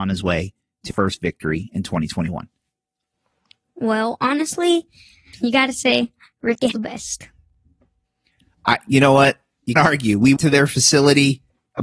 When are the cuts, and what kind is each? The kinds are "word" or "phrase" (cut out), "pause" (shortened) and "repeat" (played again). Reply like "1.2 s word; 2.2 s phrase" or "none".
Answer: 0.9 s word; 5.3 s word; 6.7 s word; 9.8 s word; 10.4 s word

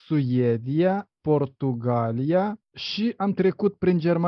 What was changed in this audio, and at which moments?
2.6 s pause

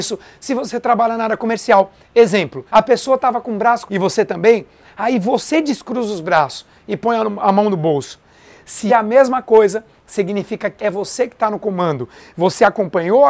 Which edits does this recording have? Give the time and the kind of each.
2.7 s pause; 3.9 s word; 8.9 s phrase; 10.8 s word

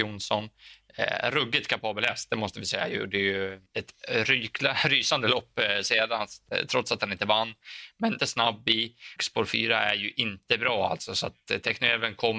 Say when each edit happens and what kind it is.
3.7 s pause; 8.2 s phrase; 9.2 s word

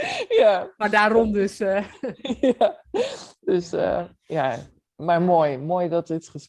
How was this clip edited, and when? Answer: none

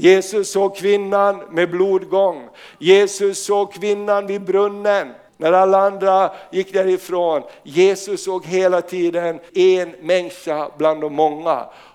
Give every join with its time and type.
5.3 s pause; 9.5 s word

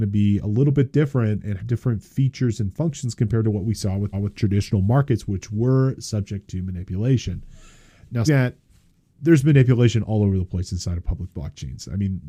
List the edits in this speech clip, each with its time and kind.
1.6 s word; 4.1 s repeat; 8.3 s word

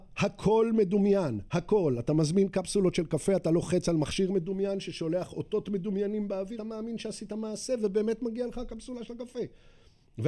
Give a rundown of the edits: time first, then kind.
6.6 s word

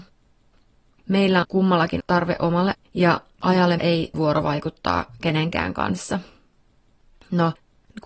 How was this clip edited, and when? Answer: 1.4 s word; 2.0 s word; 2.7 s word; 3.8 s word; 4.1 s word

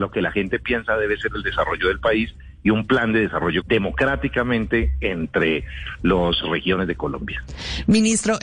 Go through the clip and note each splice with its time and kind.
3.6 s word; 6.4 s phrase

